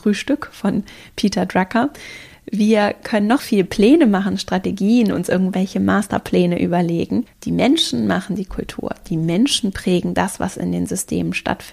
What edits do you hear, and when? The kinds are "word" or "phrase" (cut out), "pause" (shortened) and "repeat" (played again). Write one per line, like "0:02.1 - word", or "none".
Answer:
0:03.4 - word
0:07.3 - pause